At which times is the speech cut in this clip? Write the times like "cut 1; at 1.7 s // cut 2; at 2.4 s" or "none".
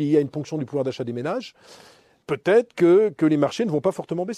cut 1; at 2.2 s